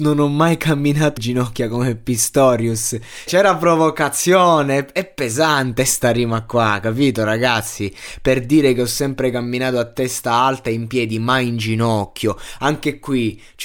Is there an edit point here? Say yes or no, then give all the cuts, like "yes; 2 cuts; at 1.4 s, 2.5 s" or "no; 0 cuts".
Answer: yes; 2 cuts; at 1.2 s, 3.3 s